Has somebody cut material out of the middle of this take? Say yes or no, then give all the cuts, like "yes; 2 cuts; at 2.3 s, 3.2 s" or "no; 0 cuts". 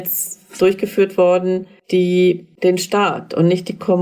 no; 0 cuts